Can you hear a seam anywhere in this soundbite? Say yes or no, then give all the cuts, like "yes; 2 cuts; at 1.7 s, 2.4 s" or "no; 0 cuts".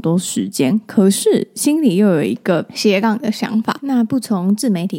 no; 0 cuts